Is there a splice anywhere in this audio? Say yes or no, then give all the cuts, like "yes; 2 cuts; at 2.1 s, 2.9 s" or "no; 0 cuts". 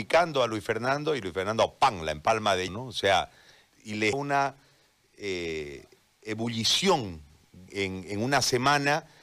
yes; 4 cuts; at 2.7 s, 3.7 s, 4.1 s, 7.7 s